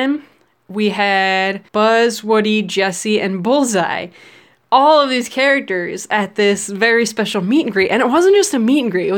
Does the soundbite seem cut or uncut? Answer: cut